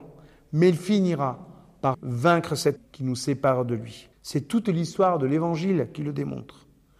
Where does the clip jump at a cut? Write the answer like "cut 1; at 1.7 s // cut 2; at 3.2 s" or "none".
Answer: cut 1; at 1.9 s // cut 2; at 2.8 s // cut 3; at 4.1 s